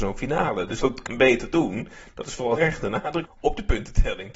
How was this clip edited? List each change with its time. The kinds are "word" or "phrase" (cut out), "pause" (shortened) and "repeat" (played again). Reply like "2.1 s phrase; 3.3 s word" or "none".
1.1 s word; 2.6 s word; 3.3 s word